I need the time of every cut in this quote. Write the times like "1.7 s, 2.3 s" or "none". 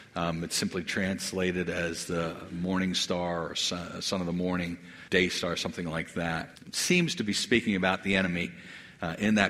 5.1 s, 6.6 s